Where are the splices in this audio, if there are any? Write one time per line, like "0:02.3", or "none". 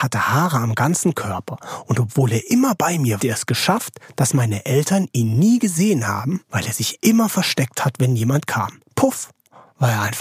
0:03.2